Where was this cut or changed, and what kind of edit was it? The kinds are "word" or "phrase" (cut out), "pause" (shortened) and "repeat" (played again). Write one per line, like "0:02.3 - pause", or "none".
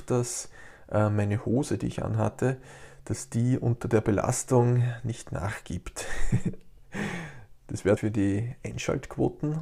0:08.0 - phrase